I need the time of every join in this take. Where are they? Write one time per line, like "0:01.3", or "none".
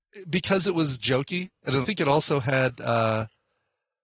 0:01.8